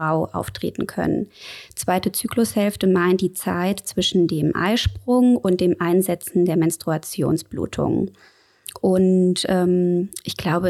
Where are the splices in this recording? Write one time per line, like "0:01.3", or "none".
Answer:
none